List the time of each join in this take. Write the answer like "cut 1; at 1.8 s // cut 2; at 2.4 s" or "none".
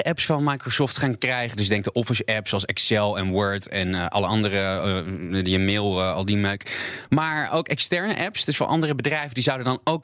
none